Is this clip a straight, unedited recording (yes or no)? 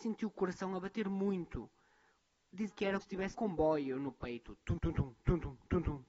no